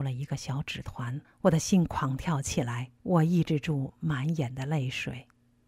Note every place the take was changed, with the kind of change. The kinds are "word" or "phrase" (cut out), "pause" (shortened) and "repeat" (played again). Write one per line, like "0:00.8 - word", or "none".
0:01.2 - pause
0:03.0 - pause

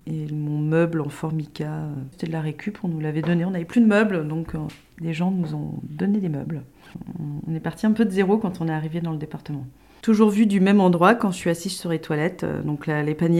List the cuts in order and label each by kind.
none

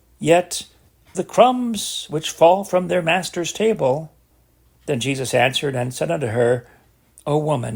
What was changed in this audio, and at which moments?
0:01.1 - phrase
0:04.3 - pause

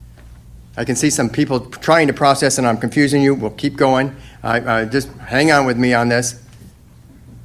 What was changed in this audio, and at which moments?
none

